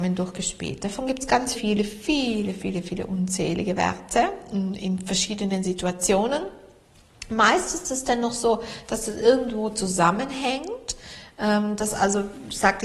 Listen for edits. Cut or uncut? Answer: cut